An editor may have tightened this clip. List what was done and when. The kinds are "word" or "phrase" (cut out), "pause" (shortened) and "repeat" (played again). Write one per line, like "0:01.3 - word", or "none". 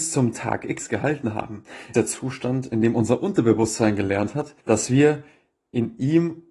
0:01.9 - word
0:04.6 - pause